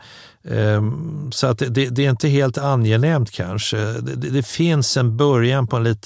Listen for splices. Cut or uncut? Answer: uncut